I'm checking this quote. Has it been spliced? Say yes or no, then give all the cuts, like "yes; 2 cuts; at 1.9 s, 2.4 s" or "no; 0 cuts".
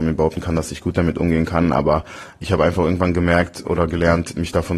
no; 0 cuts